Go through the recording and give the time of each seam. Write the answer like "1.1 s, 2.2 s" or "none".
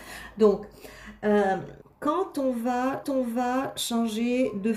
1.8 s, 3.0 s